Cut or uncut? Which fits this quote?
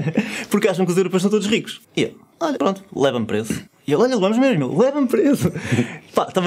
cut